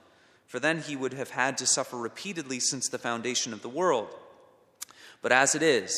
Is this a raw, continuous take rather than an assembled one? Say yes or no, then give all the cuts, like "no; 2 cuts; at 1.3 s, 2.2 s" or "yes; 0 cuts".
yes; 0 cuts